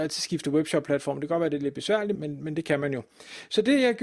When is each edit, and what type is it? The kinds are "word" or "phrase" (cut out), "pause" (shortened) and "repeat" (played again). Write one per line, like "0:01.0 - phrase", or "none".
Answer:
0:02.1 - word